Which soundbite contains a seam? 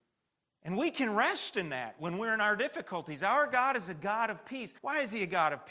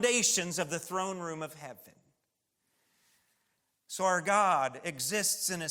first; 1 cut; at 4.8 s

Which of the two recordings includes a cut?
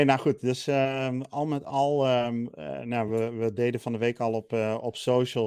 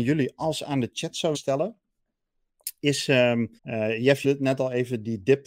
second; 3 cuts; at 1.3 s, 3.6 s, 4.2 s

